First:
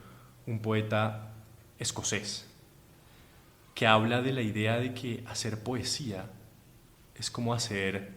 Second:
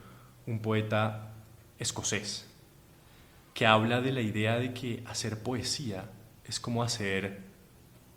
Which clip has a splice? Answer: second; 2 cuts; at 3.5 s, 6.4 s

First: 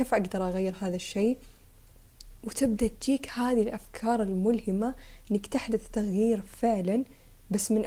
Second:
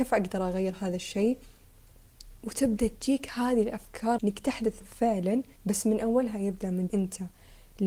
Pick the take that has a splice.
second; 4 cuts; at 4.2 s, 4.8 s, 5.6 s, 6.9 s

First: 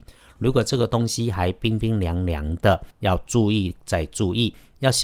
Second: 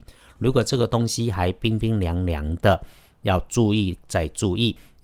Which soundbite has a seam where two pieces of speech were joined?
first; 1 cut; at 2.9 s

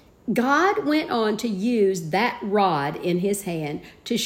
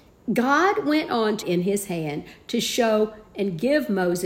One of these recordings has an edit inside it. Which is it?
second; 1 cut; at 1.4 s

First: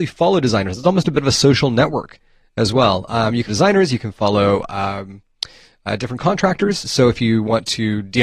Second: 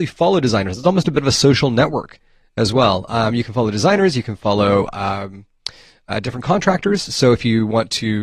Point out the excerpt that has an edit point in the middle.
first; 1 cut; at 3.5 s

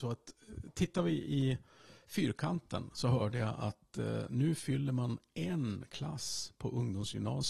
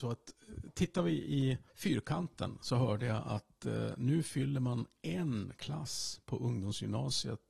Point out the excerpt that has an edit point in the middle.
second; 1 cut; at 1.7 s

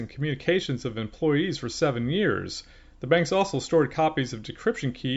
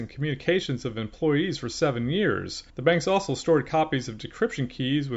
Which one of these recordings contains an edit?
second; 1 cut; at 2.7 s

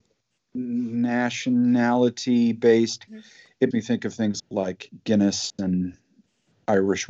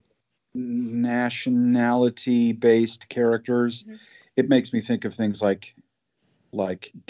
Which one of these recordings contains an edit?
first; 3 cuts; at 3.1 s, 3.7 s, 4.4 s

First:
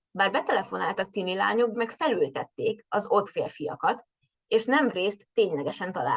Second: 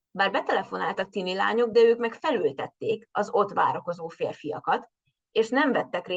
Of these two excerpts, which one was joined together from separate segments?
first; 3 cuts; at 1.7 s, 3.3 s, 4.9 s

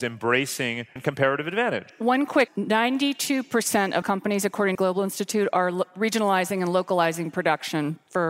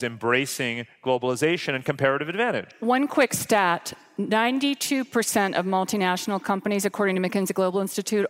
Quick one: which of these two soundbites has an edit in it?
first; 4 cuts; at 1.0 s, 2.5 s, 4.0 s, 4.7 s

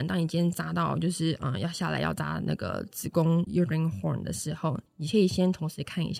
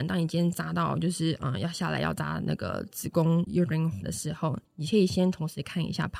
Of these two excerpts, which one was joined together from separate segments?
second; 1 cut; at 4.0 s

